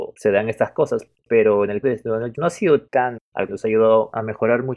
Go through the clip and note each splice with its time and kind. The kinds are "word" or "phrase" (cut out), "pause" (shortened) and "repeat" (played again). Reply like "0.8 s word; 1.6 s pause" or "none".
1.8 s word; 2.3 s word; 3.2 s word; 3.5 s word